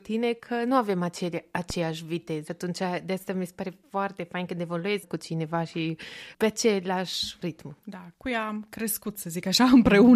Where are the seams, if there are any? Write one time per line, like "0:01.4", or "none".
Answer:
0:02.5
0:05.0
0:07.8